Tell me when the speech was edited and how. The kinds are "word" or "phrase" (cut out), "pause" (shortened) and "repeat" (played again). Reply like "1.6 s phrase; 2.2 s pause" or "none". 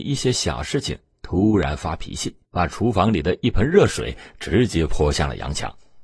2.4 s pause